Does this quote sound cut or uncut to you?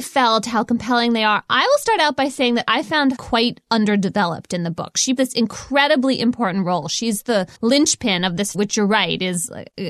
cut